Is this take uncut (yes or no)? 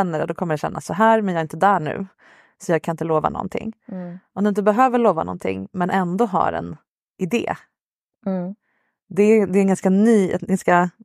yes